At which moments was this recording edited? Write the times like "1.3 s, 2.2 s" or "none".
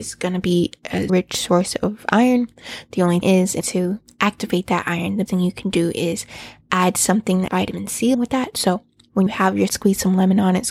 1.1 s, 3.2 s, 3.6 s, 5.3 s, 7.5 s, 8.1 s, 9.3 s, 9.7 s